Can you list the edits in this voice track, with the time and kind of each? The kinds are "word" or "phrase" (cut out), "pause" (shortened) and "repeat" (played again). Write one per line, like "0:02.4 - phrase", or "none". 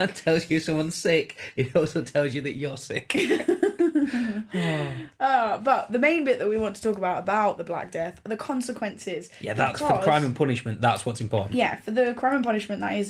none